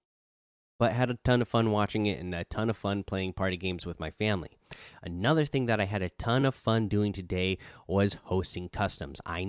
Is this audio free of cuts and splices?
yes; 0 cuts

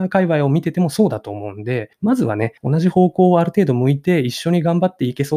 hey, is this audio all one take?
no; 2 cuts; at 1.9 s, 2.6 s

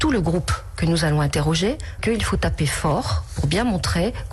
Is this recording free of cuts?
no; 1 cut; at 2.0 s

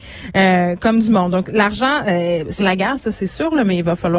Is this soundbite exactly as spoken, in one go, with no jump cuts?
no; 1 cut; at 2.6 s

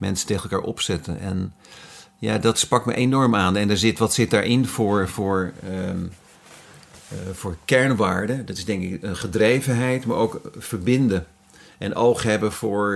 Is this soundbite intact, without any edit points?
yes; 0 cuts

